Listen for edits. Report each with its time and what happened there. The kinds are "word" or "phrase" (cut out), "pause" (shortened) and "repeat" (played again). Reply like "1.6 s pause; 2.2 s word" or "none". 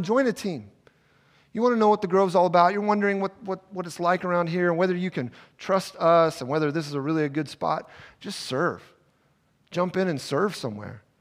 none